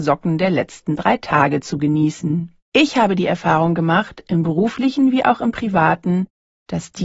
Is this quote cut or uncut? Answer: cut